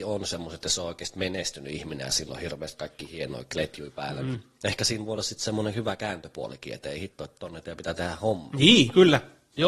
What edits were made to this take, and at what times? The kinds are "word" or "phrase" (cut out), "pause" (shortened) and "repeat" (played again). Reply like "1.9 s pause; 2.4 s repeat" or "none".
none

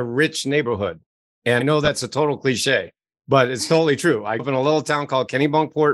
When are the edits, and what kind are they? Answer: 1.6 s word; 4.4 s word

